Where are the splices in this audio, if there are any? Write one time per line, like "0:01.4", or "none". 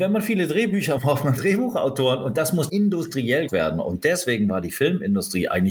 0:01.0
0:01.4
0:02.7
0:03.5